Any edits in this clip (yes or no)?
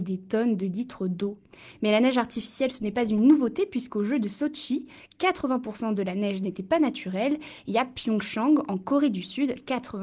no